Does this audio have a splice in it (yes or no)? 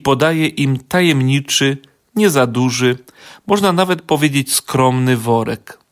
no